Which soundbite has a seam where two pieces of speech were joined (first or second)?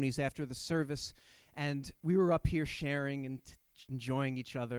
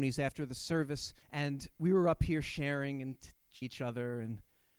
second